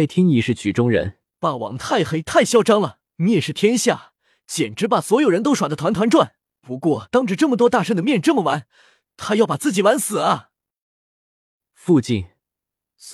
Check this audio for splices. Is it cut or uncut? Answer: cut